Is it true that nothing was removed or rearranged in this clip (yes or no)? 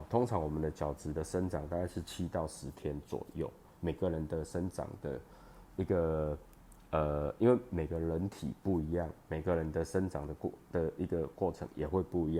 yes